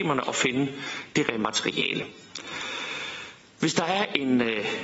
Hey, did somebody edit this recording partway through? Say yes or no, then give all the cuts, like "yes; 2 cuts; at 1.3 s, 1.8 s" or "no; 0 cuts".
yes; 1 cut; at 1.2 s